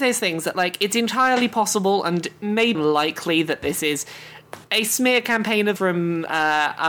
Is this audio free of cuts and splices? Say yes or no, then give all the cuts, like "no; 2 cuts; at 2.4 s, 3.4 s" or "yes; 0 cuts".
no; 3 cuts; at 2.7 s, 4.6 s, 5.8 s